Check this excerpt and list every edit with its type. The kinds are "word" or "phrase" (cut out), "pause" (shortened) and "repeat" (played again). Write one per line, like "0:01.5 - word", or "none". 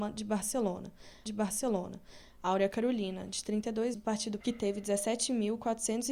0:01.3 - repeat
0:03.9 - word
0:04.4 - word